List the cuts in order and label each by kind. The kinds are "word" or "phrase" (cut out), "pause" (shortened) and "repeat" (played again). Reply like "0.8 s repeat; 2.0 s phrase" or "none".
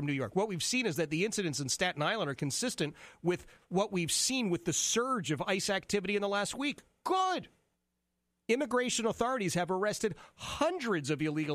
7.7 s pause

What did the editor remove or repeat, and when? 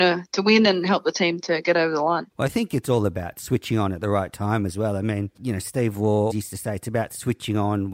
2.3 s pause; 5.3 s pause; 6.3 s word

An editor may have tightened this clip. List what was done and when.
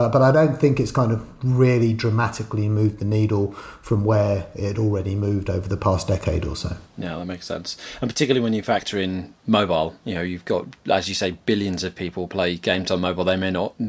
6.8 s pause

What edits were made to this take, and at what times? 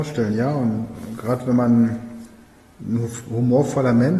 none

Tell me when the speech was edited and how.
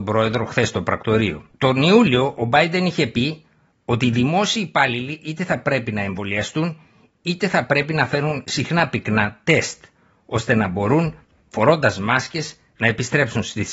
1.5 s pause

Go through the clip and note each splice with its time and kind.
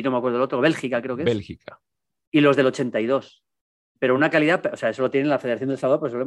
none

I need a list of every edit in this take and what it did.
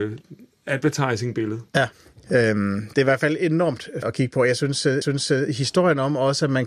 4.0 s phrase; 5.0 s repeat

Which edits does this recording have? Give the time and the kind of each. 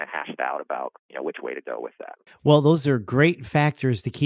1.0 s pause; 2.3 s pause

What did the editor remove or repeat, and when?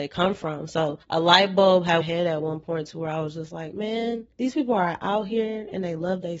1.0 s pause; 2.0 s phrase; 4.3 s pause

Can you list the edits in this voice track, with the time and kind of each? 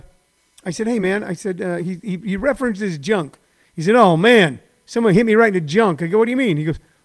none

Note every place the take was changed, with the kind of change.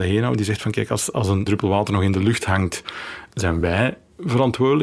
none

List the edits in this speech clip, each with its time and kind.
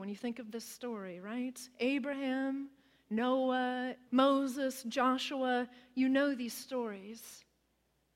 4.1 s word

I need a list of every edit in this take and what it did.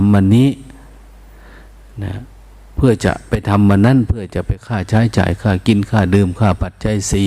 none

